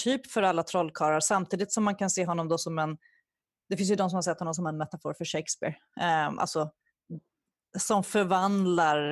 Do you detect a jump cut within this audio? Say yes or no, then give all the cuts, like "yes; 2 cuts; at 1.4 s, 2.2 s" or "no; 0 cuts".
no; 0 cuts